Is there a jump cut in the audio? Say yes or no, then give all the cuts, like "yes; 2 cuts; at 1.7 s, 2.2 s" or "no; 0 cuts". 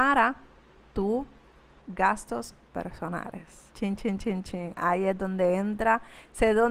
yes; 1 cut; at 3.7 s